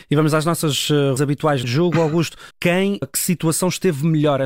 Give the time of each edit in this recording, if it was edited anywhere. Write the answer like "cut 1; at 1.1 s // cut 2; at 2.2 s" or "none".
cut 1; at 1.2 s // cut 2; at 1.6 s // cut 3; at 2.5 s // cut 4; at 3.0 s